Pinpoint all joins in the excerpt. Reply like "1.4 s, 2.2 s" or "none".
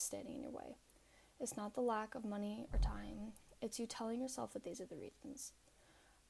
none